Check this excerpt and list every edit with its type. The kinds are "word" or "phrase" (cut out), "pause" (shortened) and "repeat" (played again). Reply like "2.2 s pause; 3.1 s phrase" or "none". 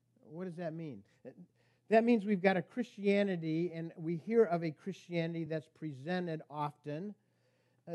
none